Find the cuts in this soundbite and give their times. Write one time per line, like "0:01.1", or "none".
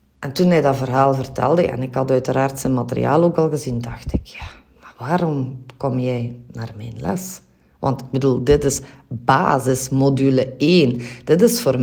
none